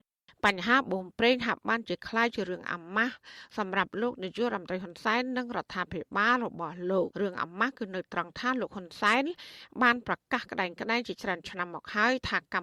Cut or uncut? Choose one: cut